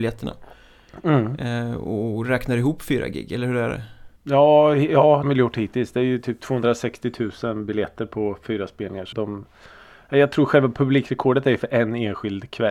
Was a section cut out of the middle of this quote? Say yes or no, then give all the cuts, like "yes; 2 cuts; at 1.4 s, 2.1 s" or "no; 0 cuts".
yes; 3 cuts; at 4.2 s, 5.2 s, 9.1 s